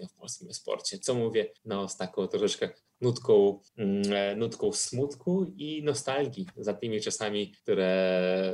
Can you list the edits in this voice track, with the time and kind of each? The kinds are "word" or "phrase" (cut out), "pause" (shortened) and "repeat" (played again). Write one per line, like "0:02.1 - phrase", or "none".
0:01.6 - pause
0:03.7 - pause
0:07.6 - pause